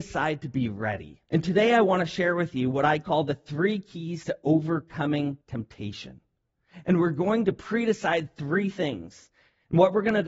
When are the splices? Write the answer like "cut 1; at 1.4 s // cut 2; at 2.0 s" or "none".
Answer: cut 1; at 1.2 s // cut 2; at 5.4 s